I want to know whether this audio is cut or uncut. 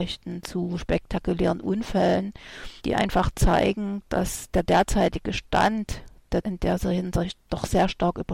cut